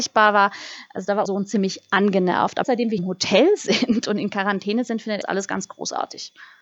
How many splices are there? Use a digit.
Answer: 4